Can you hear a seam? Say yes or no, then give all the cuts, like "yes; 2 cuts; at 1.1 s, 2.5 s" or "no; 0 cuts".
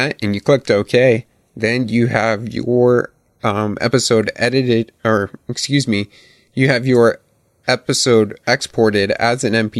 no; 0 cuts